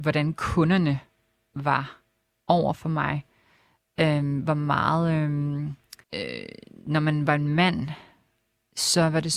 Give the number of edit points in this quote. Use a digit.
1